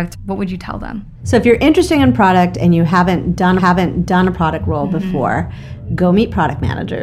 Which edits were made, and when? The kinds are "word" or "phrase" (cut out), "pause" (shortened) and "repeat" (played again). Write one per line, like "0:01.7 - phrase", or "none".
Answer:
0:03.6 - repeat